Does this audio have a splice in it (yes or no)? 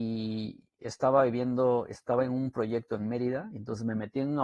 no